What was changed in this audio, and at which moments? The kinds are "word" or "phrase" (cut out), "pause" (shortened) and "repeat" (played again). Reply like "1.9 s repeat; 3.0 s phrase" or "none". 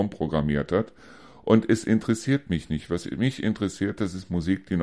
none